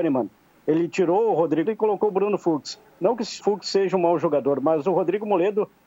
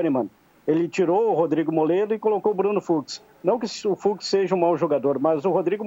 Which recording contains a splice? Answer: first; 2 cuts; at 1.7 s, 3.4 s

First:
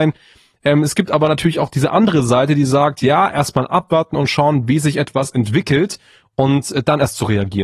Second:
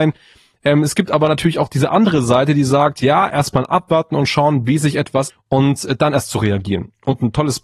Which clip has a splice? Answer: second; 1 cut; at 5.3 s

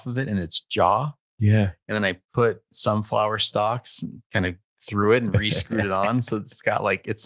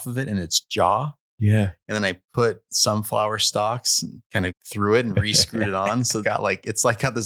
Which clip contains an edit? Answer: second; 2 cuts; at 4.5 s, 6.2 s

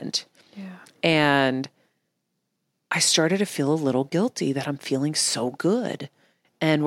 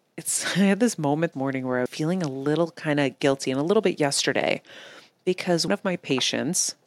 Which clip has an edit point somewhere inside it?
second; 3 cuts; at 1.3 s, 1.9 s, 5.7 s

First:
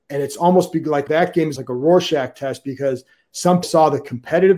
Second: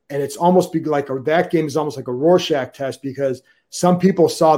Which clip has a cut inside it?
first; 3 cuts; at 1.1 s, 1.6 s, 3.6 s

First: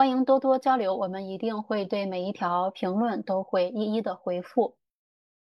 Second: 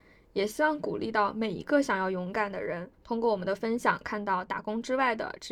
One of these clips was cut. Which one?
second; 1 cut; at 2.9 s

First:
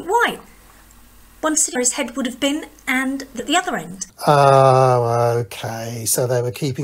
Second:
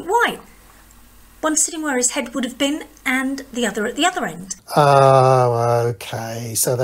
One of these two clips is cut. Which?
first; 2 cuts; at 1.8 s, 3.4 s

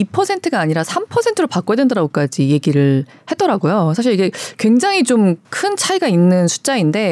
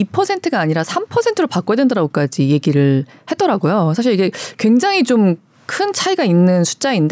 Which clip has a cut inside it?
first; 1 cut; at 5.4 s

